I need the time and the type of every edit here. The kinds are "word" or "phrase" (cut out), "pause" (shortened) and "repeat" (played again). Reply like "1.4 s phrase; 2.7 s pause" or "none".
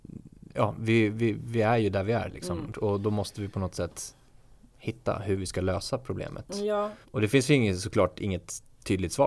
7.0 s pause

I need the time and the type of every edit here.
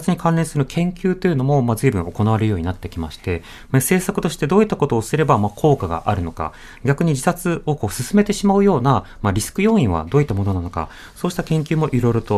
none

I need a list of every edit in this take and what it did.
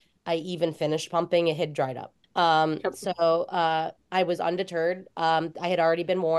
2.2 s pause; 4.0 s pause

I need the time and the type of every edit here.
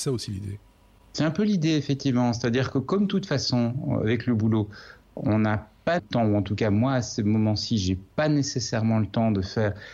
6.0 s phrase

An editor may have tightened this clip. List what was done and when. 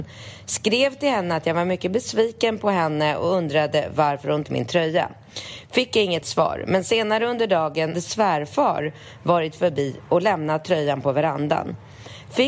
4.4 s word; 6.2 s word; 7.9 s word

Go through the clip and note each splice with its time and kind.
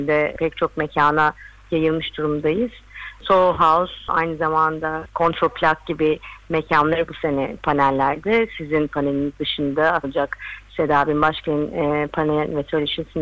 7.1 s word; 10.0 s phrase

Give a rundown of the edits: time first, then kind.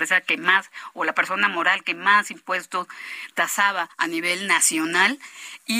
3.9 s pause

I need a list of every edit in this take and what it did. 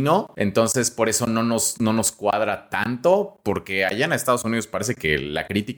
none

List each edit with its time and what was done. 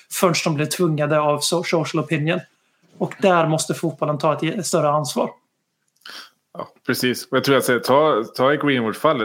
none

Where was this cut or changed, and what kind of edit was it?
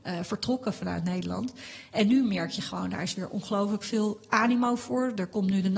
none

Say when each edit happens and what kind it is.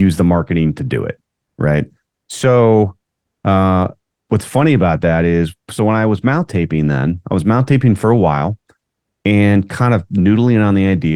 2.1 s pause

